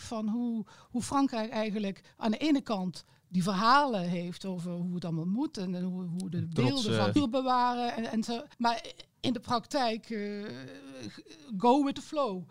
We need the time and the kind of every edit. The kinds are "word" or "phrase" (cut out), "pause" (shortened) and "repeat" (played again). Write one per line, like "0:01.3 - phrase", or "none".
0:07.2 - phrase
0:08.5 - pause